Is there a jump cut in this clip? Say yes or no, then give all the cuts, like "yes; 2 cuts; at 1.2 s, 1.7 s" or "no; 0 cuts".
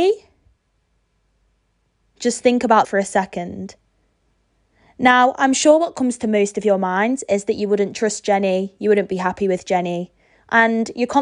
yes; 1 cut; at 2.8 s